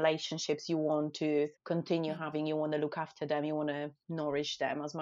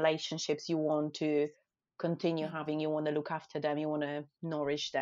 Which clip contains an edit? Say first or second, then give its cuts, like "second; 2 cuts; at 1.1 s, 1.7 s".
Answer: first; 1 cut; at 1.6 s